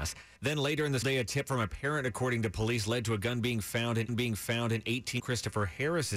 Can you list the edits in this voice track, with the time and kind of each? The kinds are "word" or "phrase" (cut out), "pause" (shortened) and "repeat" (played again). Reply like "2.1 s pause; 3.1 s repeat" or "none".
1.0 s word; 4.1 s repeat; 5.2 s phrase